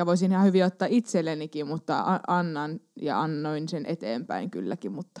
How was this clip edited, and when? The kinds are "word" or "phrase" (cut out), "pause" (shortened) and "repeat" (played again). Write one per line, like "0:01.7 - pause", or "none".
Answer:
none

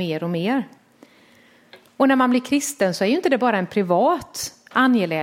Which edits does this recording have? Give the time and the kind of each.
none

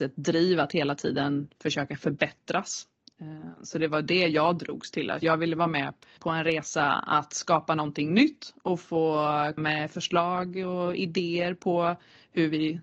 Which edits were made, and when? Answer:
0:05.2 - phrase
0:06.2 - word
0:09.6 - word

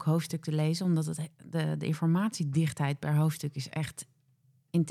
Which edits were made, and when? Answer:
none

